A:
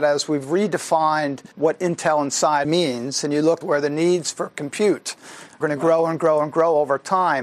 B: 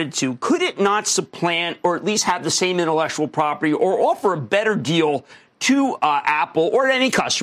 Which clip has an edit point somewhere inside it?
A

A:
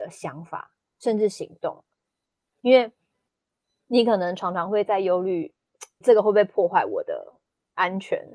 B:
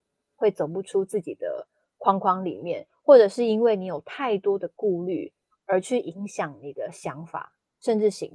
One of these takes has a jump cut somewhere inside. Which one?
A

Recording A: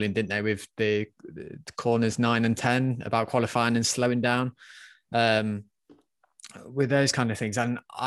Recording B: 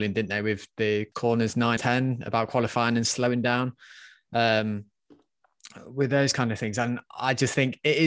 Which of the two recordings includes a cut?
B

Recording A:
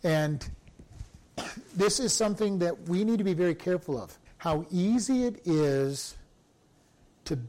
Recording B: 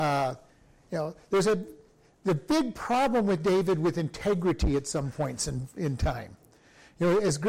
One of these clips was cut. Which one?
A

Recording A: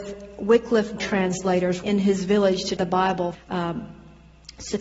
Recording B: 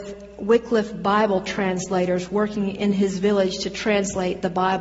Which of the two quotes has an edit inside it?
A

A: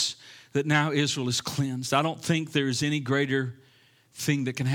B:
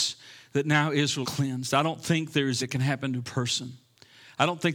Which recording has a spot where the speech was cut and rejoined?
B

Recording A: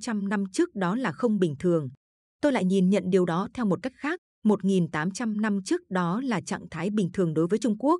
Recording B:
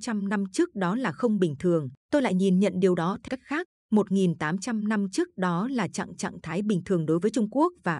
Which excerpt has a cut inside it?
B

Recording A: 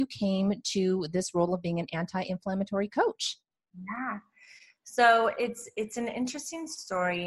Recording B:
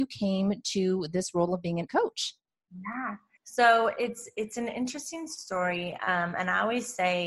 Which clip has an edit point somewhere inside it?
B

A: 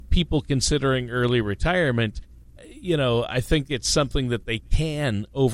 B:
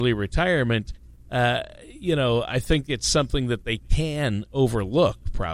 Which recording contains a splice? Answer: A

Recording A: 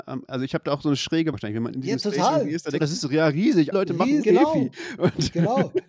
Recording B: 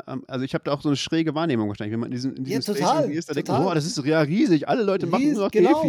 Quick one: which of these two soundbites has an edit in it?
A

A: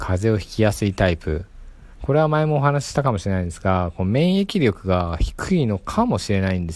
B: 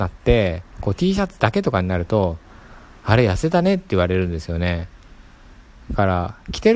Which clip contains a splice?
A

